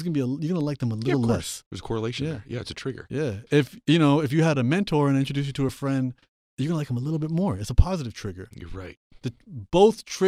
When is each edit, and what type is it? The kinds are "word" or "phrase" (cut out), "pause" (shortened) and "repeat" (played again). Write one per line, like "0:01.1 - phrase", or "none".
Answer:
none